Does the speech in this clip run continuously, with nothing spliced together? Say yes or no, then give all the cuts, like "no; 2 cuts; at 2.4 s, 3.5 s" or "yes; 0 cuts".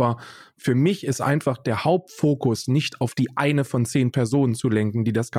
yes; 0 cuts